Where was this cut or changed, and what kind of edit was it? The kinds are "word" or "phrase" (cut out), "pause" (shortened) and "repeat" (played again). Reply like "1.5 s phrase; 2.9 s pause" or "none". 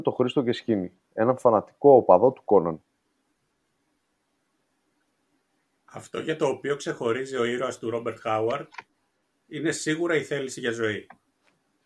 none